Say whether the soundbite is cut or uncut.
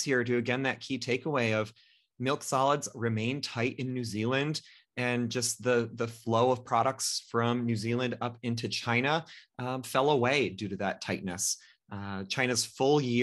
uncut